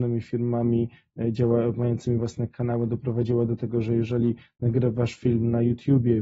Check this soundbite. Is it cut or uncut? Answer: uncut